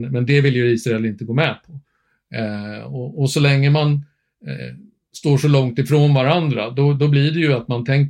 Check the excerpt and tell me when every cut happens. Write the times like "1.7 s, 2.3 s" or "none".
none